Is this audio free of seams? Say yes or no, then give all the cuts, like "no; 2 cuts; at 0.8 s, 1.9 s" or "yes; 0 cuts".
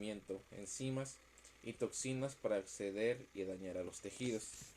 no; 1 cut; at 1.6 s